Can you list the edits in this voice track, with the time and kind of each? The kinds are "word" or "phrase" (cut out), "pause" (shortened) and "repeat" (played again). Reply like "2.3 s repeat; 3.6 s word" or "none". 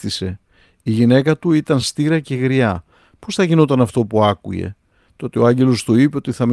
none

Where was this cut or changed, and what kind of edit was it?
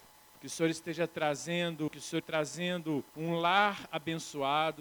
1.9 s word; 2.2 s word; 3.1 s pause

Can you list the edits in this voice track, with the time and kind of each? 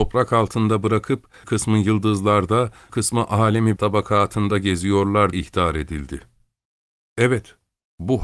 1.4 s word; 2.9 s word; 3.8 s word; 5.3 s word

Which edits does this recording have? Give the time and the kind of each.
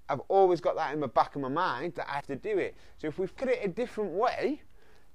2.2 s word; 3.4 s word

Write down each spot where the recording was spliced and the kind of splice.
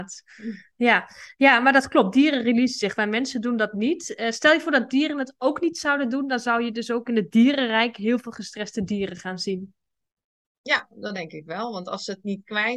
none

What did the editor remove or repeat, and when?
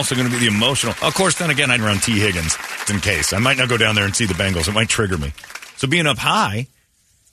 1.8 s phrase; 2.8 s word

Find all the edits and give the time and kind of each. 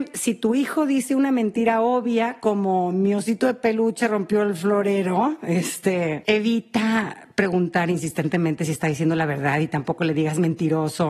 none

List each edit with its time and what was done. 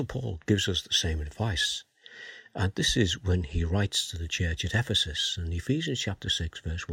none

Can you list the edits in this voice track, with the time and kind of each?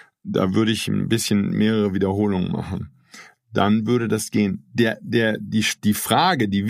none

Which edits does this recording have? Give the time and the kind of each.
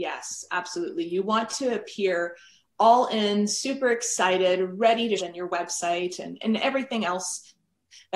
5.2 s phrase

